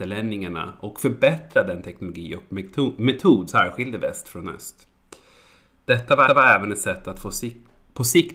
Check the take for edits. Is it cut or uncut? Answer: cut